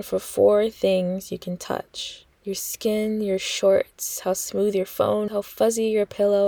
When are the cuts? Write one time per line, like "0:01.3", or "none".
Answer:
0:02.3
0:05.3